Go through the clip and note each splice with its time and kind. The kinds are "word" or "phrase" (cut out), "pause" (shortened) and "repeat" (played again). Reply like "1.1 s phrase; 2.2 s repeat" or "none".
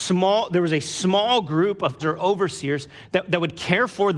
2.0 s phrase

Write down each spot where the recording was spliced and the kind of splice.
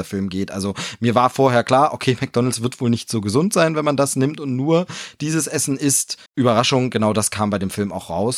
6.3 s pause

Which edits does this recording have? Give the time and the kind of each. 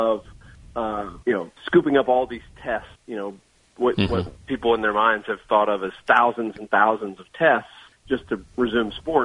1.2 s pause; 1.6 s pause; 3.0 s pause; 7.9 s pause

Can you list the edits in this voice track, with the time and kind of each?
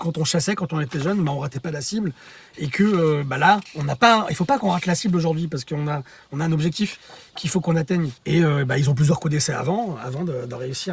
8.2 s pause

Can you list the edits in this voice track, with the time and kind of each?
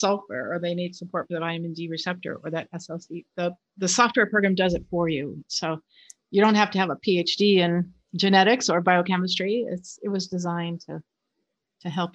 none

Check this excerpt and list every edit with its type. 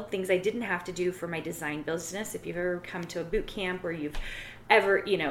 none

